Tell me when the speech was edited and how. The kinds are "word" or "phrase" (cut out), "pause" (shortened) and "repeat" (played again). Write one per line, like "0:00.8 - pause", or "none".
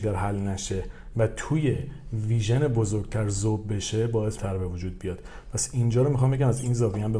0:04.4 - phrase